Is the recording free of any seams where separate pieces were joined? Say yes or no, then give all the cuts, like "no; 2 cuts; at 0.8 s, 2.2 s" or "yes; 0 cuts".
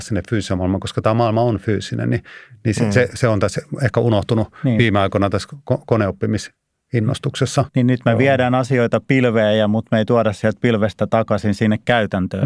yes; 0 cuts